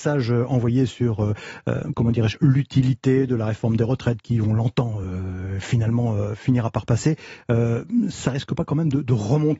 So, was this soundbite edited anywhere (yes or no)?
no